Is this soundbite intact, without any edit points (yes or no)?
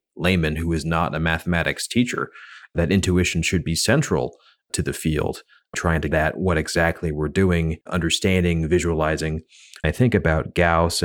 no